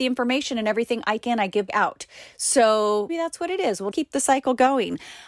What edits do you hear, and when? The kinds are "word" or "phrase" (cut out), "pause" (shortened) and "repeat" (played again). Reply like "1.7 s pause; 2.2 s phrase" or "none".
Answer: 1.2 s word; 1.7 s word; 3.1 s word; 3.9 s word